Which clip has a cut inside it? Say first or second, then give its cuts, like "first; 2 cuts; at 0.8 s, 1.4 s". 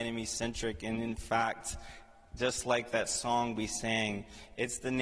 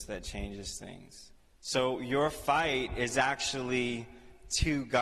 second; 1 cut; at 1.4 s